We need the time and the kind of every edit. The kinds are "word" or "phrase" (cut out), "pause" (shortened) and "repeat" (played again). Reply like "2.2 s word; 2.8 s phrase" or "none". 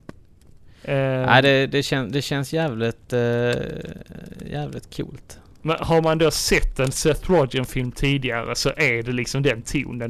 none